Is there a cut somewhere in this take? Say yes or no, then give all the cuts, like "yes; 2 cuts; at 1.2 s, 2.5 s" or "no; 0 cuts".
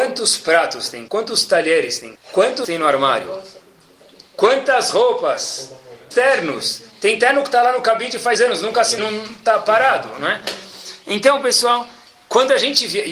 yes; 6 cuts; at 1.1 s, 2.1 s, 2.6 s, 6.1 s, 8.3 s, 9.0 s